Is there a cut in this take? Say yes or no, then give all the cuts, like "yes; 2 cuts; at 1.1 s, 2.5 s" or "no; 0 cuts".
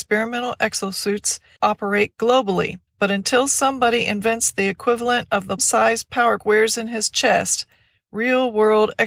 yes; 4 cuts; at 1.6 s, 2.9 s, 5.6 s, 6.4 s